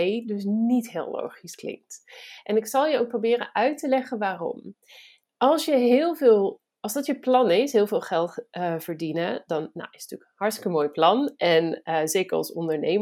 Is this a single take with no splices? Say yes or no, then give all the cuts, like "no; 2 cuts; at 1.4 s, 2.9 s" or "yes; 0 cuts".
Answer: yes; 0 cuts